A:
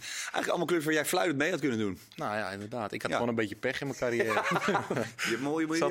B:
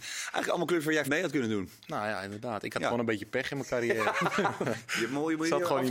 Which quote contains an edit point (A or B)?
B